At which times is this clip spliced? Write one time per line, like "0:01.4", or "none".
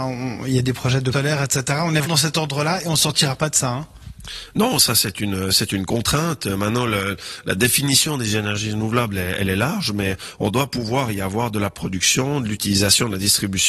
0:01.1
0:02.1